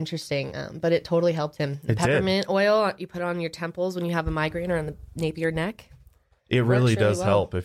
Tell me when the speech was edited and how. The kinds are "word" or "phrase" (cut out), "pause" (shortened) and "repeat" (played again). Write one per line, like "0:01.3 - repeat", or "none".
none